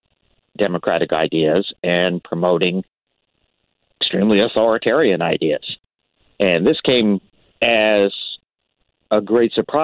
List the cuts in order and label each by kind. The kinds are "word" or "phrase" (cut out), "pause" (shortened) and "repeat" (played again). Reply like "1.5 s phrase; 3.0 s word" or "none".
none